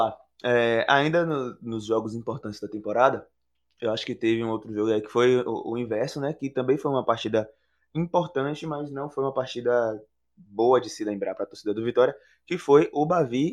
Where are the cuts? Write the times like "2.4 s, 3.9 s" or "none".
none